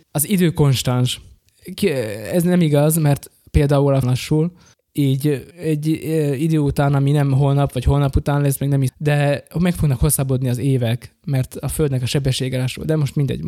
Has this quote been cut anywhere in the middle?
yes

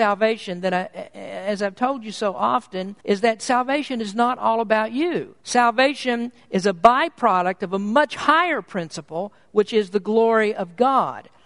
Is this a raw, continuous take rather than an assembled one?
no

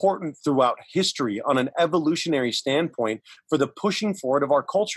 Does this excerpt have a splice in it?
no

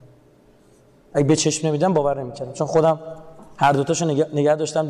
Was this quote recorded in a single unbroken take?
yes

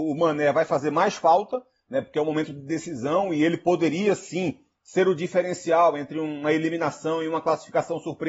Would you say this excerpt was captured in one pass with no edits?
yes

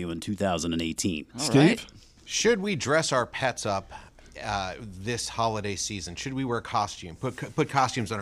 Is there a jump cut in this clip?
no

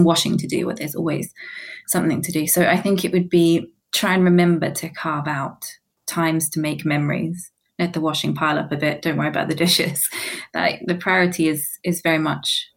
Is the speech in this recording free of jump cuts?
yes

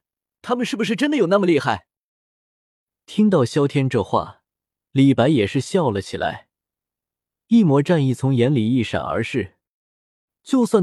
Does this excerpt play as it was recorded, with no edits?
yes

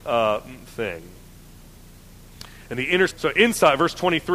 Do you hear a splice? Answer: yes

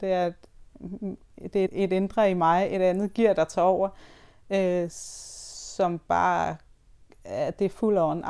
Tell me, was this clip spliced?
yes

